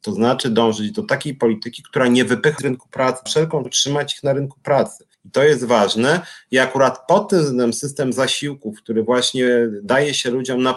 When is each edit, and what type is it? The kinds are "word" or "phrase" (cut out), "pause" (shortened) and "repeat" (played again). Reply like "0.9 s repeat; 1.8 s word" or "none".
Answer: 2.6 s word; 3.3 s phrase; 3.6 s word; 5.1 s pause